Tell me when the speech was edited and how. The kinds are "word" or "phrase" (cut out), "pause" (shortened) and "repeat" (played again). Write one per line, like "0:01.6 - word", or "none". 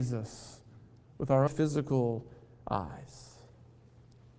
0:01.5 - word